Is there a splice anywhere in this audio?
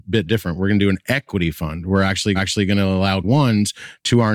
yes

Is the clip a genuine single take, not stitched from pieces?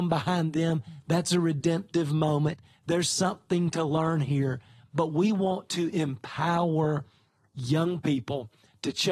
yes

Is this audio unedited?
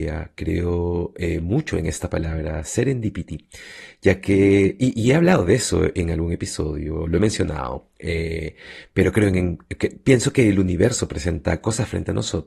yes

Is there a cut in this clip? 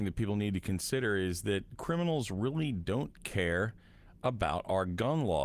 no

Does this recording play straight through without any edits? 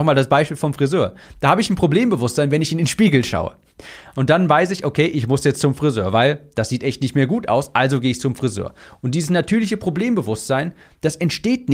yes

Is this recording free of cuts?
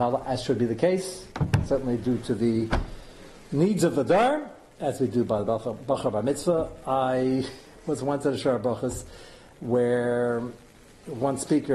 yes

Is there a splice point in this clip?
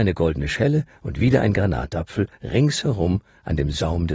no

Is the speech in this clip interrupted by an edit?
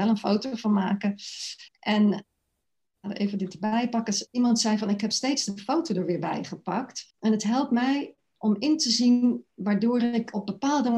yes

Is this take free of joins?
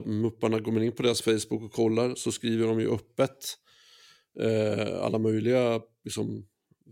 yes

